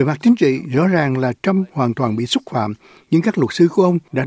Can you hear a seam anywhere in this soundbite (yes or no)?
no